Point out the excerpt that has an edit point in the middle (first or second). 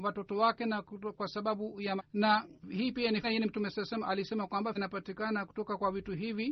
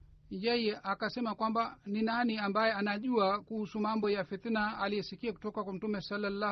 first